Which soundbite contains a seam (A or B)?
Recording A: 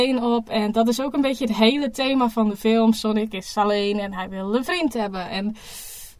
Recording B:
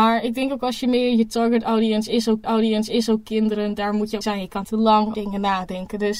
B